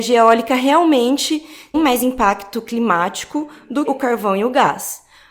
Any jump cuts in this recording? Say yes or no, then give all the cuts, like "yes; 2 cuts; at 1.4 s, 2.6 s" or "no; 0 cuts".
yes; 2 cuts; at 1.7 s, 3.9 s